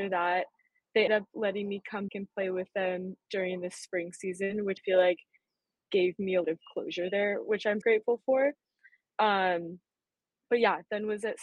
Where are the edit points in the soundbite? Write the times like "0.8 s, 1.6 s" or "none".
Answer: 1.1 s, 2.1 s, 4.8 s, 6.4 s, 7.8 s

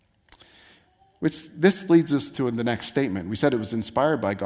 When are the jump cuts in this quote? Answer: none

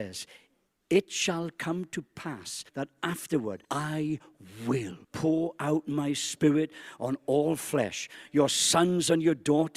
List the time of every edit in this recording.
2.7 s, 3.6 s, 5.0 s

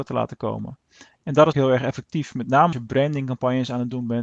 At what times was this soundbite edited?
1.5 s, 2.7 s

